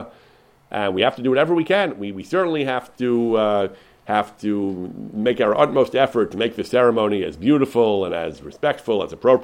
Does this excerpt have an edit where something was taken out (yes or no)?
no